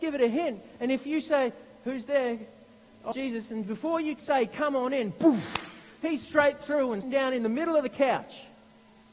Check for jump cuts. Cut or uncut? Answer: cut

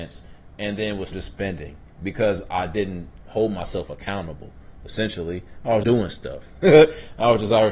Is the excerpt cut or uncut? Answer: cut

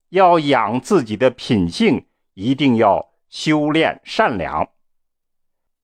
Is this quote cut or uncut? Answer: uncut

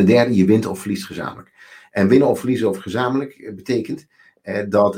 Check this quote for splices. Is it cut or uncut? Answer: uncut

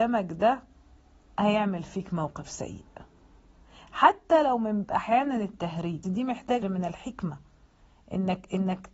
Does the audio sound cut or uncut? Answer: cut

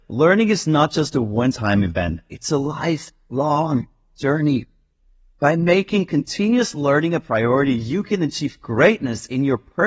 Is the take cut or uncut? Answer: uncut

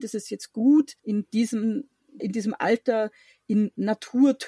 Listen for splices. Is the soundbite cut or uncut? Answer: cut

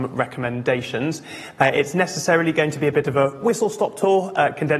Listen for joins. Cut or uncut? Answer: uncut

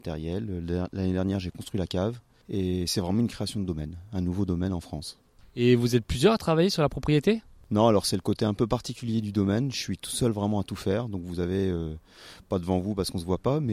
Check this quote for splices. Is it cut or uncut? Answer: uncut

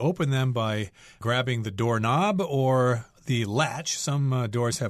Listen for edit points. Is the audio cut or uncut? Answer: uncut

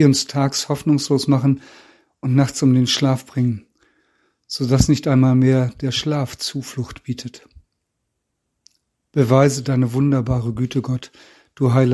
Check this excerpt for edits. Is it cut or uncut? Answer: uncut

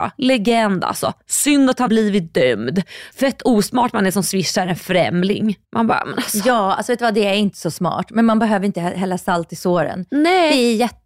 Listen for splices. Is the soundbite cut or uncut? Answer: cut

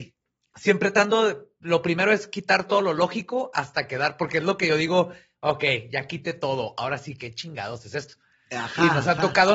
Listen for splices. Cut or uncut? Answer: uncut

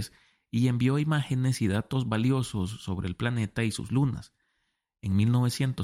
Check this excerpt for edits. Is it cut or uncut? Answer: uncut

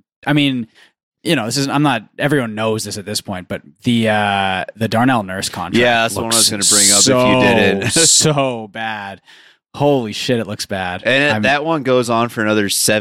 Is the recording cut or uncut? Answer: uncut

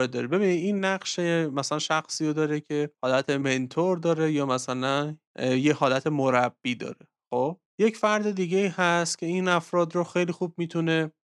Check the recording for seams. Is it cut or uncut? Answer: cut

